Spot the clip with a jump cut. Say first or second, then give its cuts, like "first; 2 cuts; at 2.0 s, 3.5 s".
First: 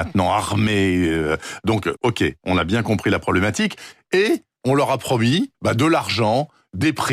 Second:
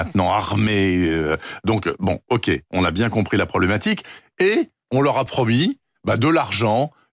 first; 2 cuts; at 2.0 s, 5.5 s